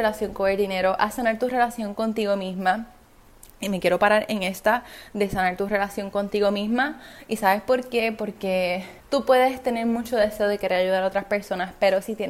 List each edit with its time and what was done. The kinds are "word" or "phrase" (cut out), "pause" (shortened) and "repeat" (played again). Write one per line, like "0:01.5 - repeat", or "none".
0:09.0 - pause